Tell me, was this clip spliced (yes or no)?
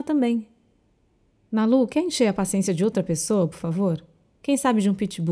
no